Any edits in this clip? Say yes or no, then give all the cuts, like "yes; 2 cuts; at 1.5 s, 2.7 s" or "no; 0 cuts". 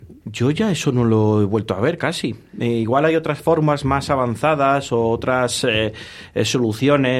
no; 0 cuts